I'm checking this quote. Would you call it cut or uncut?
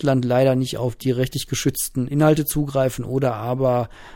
uncut